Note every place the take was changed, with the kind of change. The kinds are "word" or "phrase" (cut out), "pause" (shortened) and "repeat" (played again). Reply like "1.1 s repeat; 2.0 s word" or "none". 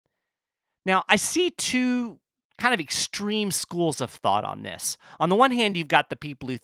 none